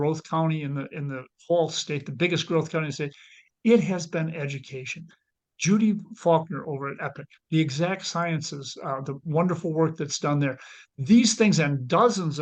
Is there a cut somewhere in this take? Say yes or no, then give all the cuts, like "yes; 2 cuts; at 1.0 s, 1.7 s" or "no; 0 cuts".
no; 0 cuts